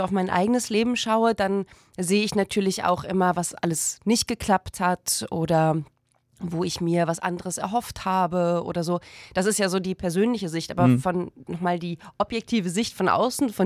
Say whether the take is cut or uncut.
uncut